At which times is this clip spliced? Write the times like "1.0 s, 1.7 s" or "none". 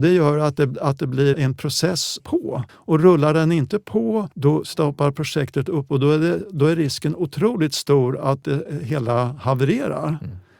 1.3 s, 2.2 s, 2.7 s, 4.3 s